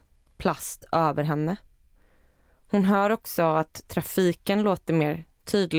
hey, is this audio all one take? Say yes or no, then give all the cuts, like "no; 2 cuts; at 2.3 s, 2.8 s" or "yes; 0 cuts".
yes; 0 cuts